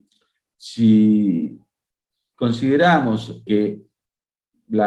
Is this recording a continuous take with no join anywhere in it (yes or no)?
no